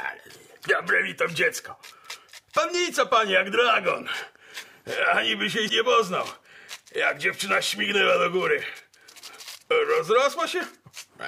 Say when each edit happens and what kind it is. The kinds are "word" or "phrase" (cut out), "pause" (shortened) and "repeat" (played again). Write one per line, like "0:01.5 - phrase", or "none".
0:05.7 - word